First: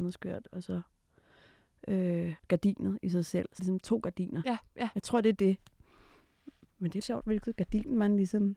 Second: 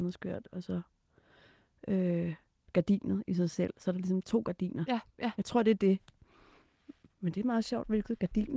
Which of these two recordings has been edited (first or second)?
first